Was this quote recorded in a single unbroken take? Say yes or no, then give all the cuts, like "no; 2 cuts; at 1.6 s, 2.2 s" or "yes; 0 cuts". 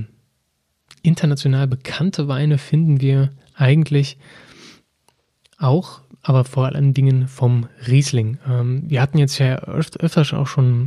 yes; 0 cuts